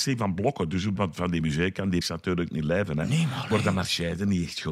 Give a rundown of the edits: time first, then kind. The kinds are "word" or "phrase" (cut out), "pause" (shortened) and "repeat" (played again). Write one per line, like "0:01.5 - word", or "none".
0:01.0 - phrase
0:02.0 - word